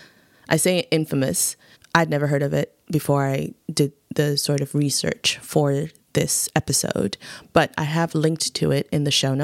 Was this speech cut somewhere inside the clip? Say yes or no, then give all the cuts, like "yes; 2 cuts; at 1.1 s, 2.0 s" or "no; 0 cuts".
yes; 2 cuts; at 1.7 s, 3.6 s